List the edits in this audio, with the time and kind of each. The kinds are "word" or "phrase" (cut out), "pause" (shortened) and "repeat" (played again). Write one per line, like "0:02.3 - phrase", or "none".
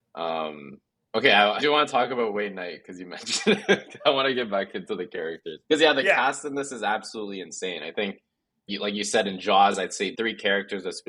0:01.6 - word
0:05.6 - pause
0:08.7 - word
0:10.1 - word